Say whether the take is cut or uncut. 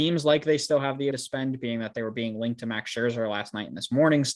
cut